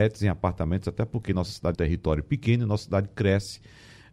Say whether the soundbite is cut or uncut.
cut